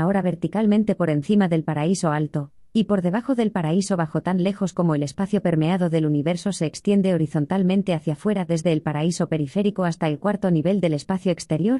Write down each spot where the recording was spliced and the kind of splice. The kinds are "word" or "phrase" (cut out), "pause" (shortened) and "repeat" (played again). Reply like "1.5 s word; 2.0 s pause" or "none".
none